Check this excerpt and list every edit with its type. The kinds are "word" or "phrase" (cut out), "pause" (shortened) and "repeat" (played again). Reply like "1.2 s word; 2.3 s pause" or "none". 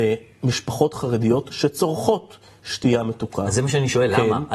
none